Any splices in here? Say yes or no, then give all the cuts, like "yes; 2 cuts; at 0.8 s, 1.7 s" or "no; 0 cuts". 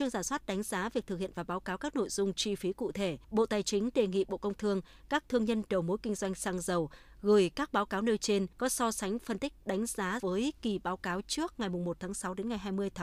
yes; 3 cuts; at 3.2 s, 8.5 s, 10.2 s